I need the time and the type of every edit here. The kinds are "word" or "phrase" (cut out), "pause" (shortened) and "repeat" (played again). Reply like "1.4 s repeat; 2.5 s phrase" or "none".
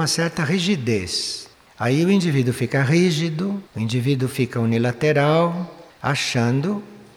1.5 s pause; 3.7 s pause